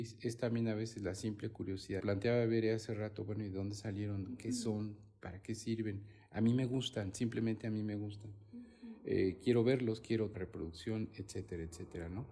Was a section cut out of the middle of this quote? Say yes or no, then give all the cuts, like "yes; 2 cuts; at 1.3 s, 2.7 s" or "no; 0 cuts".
yes; 2 cuts; at 2.0 s, 10.3 s